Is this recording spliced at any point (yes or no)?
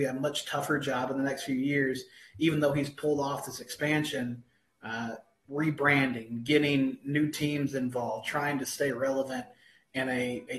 no